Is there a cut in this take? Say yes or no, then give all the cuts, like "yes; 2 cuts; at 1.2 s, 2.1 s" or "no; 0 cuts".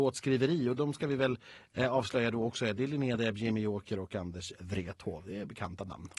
no; 0 cuts